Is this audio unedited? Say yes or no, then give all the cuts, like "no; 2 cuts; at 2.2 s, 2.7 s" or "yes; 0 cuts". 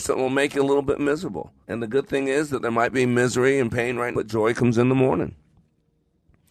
no; 2 cuts; at 1.6 s, 4.1 s